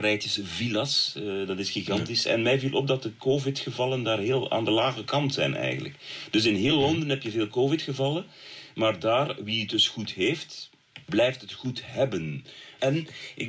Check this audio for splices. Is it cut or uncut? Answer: cut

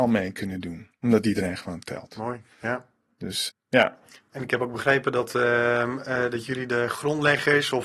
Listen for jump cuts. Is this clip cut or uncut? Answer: cut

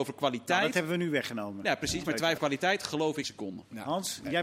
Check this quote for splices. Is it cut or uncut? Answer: cut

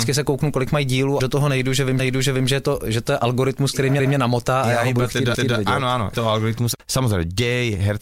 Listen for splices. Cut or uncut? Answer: cut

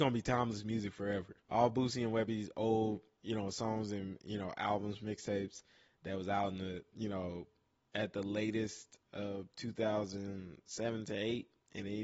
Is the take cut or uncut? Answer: cut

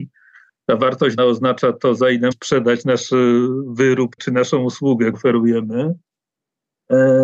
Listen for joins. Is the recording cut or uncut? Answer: cut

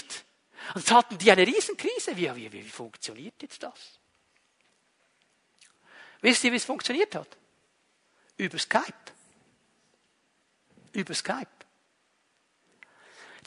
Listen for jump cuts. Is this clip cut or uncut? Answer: uncut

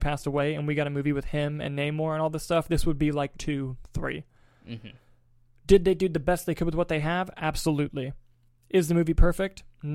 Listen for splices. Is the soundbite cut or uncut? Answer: cut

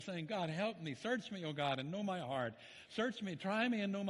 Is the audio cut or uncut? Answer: uncut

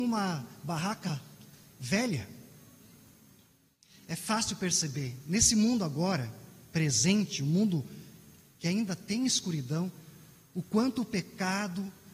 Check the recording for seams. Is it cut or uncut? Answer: uncut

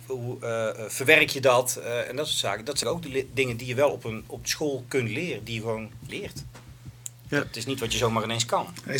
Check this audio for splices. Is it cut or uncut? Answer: cut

